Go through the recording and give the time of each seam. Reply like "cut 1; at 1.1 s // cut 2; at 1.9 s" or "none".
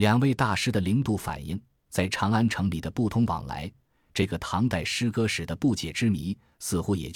none